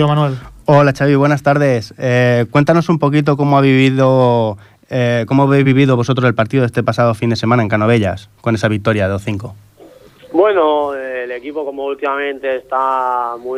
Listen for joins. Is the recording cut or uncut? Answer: uncut